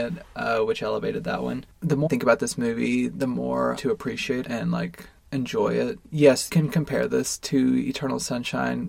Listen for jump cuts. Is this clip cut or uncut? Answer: cut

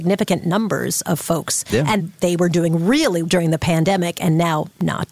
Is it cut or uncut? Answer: cut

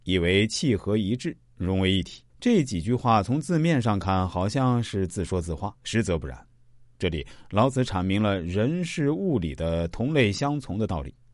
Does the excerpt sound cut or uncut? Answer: cut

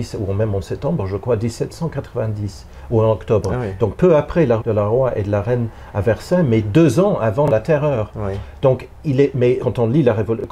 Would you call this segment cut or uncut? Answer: cut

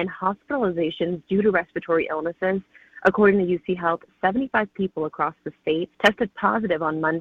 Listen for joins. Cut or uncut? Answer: cut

